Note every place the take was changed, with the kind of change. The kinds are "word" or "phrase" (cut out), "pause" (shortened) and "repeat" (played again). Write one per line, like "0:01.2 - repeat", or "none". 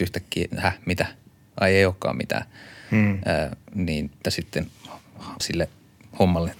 0:04.2 - word
0:05.4 - word